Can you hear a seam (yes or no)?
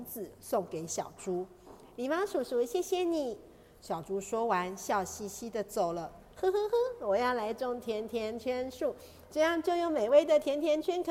no